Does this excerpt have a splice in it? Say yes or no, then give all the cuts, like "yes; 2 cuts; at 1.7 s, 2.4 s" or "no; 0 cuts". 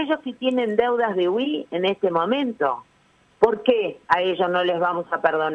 no; 0 cuts